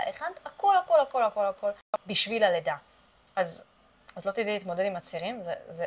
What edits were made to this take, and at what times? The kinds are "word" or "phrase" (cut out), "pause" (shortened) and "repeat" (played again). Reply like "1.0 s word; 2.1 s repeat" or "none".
none